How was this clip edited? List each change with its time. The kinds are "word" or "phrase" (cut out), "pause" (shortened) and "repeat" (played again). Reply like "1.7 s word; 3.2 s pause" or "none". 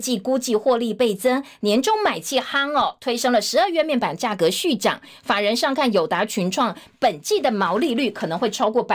none